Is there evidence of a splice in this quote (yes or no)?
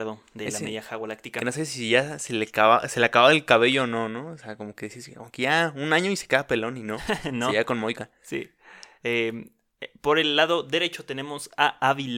no